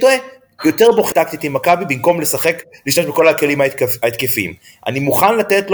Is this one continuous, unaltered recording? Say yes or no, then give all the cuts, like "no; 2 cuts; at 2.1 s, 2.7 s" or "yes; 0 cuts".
no; 1 cut; at 1.1 s